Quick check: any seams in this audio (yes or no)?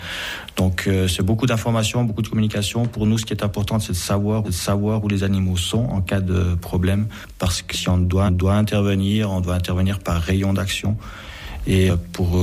yes